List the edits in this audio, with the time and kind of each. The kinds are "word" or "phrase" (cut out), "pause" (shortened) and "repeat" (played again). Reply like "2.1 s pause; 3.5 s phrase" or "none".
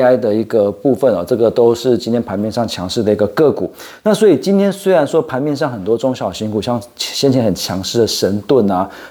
none